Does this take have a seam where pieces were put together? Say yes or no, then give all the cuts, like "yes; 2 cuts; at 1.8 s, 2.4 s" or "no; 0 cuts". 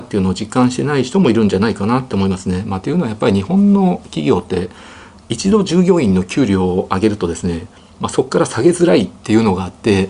no; 0 cuts